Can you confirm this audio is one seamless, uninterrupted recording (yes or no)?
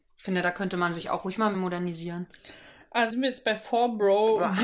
no